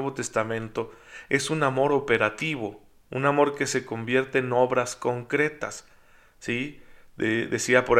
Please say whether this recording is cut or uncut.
uncut